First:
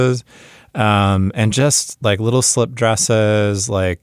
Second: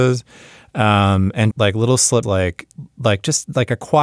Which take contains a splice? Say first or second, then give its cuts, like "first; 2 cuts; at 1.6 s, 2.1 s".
second; 2 cuts; at 1.5 s, 2.2 s